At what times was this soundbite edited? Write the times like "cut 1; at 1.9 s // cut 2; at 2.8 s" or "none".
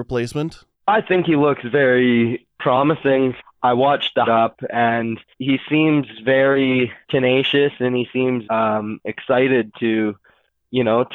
cut 1; at 4.3 s // cut 2; at 5.3 s // cut 3; at 7.0 s // cut 4; at 8.4 s